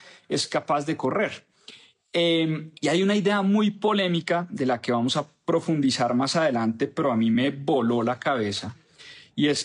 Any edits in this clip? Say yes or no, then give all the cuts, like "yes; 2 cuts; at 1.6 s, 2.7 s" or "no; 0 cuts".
yes; 1 cut; at 2.8 s